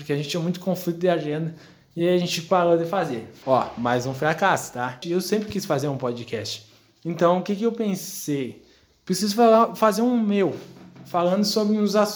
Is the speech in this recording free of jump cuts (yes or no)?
yes